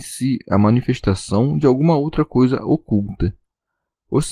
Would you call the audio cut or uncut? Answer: uncut